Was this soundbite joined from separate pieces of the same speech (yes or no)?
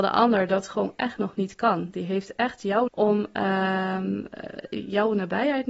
yes